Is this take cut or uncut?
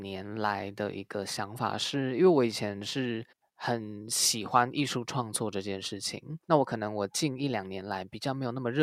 cut